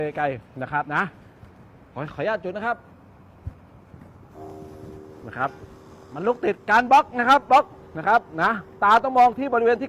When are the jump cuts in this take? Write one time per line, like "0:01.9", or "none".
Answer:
none